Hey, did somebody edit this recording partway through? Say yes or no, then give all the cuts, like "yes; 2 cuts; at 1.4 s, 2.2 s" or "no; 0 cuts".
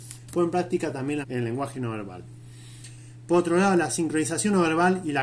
yes; 1 cut; at 1.2 s